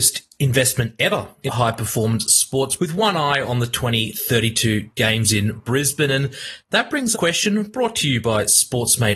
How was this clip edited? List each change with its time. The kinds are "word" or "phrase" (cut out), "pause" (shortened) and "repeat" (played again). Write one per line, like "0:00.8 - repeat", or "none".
0:01.5 - word
0:02.8 - word
0:07.1 - phrase